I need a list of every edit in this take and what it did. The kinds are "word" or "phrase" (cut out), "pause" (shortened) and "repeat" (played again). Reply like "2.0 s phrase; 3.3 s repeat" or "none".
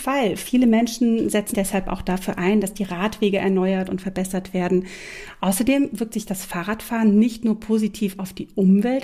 1.5 s word